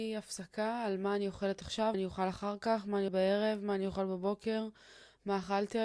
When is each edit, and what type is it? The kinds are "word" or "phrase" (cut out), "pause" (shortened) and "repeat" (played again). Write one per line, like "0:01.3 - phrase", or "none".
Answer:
0:01.9 - word
0:03.1 - word